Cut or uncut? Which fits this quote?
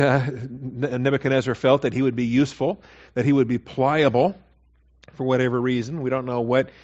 uncut